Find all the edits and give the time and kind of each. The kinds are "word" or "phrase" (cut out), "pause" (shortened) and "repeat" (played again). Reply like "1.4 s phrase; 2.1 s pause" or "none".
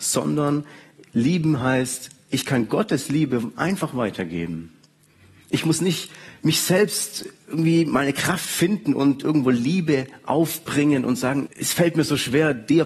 11.5 s word